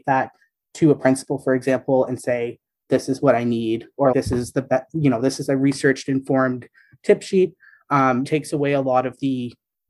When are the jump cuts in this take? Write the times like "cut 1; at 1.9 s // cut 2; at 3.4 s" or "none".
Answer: cut 1; at 4.1 s // cut 2; at 8.2 s